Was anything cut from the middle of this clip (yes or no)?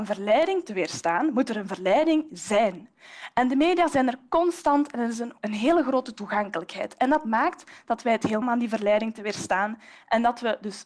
yes